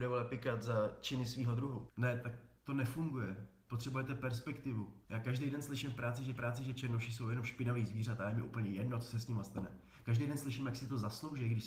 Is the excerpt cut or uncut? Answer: cut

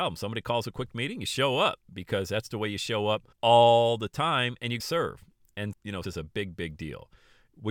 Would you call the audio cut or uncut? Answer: cut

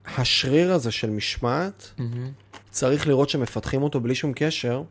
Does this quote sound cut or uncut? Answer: cut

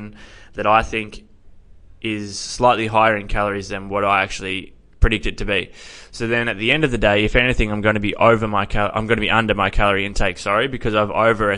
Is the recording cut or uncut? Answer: uncut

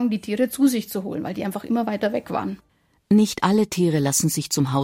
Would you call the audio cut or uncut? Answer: uncut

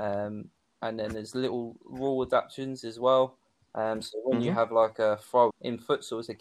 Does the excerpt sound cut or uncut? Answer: cut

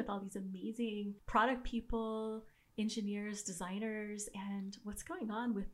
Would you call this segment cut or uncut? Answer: uncut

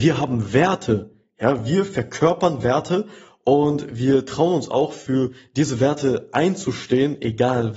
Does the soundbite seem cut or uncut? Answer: uncut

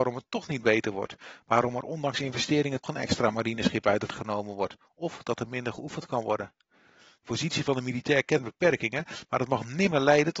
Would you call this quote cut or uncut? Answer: cut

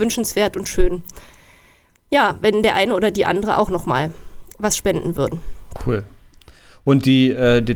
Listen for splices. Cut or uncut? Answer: uncut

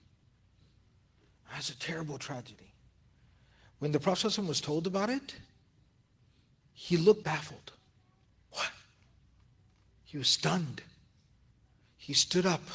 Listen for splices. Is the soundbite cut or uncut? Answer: cut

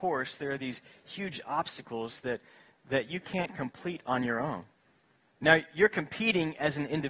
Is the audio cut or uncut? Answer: uncut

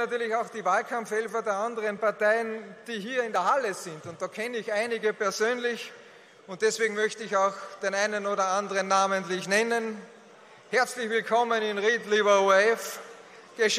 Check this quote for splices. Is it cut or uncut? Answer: uncut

